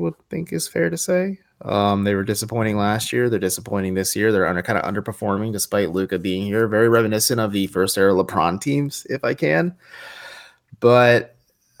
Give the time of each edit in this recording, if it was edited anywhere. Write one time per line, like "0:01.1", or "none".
none